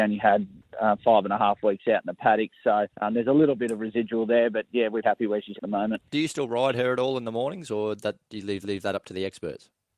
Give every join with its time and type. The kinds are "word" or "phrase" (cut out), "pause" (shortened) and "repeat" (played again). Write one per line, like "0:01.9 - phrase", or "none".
0:02.9 - pause
0:05.0 - word
0:05.6 - word
0:06.1 - pause
0:08.6 - repeat